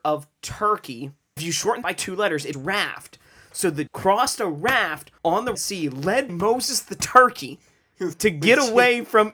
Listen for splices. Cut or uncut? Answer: cut